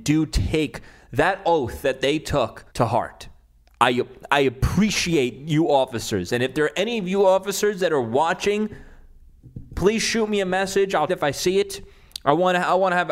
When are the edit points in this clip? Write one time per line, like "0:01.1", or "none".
0:02.7
0:11.1